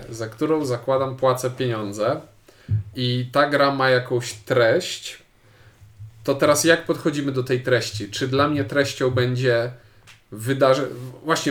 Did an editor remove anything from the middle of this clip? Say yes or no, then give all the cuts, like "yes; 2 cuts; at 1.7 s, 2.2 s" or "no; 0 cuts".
no; 0 cuts